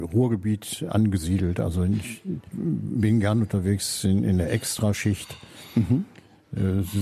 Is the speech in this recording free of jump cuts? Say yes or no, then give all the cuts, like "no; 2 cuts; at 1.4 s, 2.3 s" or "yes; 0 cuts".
yes; 0 cuts